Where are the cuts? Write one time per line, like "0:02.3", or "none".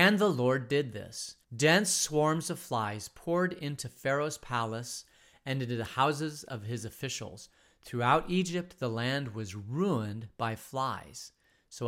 0:01.4